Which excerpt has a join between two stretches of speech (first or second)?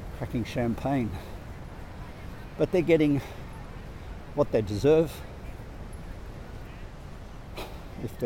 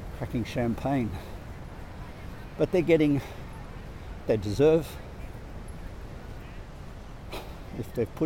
second